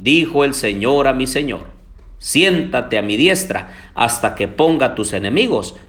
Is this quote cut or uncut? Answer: uncut